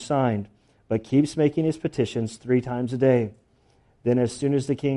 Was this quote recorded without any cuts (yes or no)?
yes